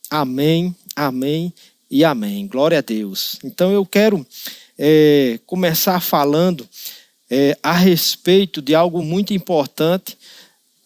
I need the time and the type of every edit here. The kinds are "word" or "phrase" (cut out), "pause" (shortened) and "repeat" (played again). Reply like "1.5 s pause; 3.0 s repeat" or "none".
none